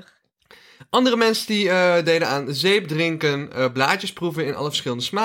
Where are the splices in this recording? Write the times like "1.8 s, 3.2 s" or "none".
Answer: none